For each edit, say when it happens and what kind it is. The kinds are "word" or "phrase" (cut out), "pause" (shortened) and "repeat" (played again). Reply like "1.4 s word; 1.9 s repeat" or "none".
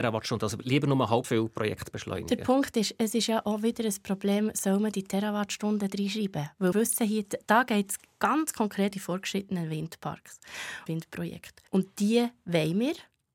1.2 s word; 6.7 s word; 8.9 s word; 10.9 s word; 11.7 s pause

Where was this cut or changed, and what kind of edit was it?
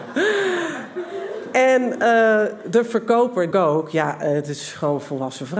3.5 s phrase

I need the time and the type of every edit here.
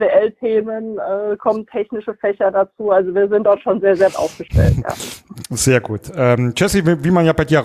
4.1 s word

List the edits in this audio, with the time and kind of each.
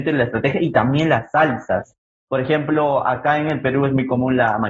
none

